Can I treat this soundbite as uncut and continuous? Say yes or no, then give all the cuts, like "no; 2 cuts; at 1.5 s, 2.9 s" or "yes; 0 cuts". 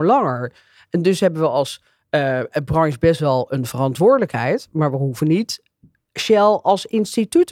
yes; 0 cuts